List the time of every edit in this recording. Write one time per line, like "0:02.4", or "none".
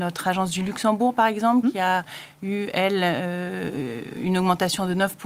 none